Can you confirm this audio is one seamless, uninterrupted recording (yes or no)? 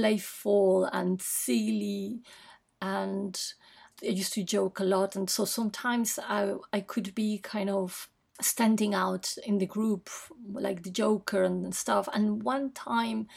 yes